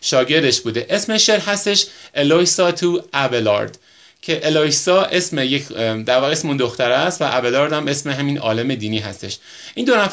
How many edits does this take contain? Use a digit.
0